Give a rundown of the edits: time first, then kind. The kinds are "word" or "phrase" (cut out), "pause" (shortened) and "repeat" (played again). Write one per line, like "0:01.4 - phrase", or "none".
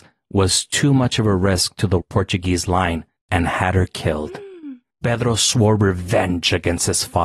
0:02.0 - word